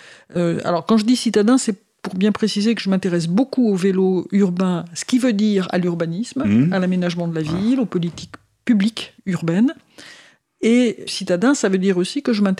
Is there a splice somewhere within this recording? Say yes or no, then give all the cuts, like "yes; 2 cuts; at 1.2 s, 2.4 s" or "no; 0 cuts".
yes; 2 cuts; at 9.2 s, 11.1 s